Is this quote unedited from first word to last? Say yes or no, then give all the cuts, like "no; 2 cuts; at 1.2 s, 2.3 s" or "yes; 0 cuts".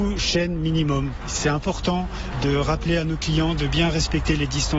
yes; 0 cuts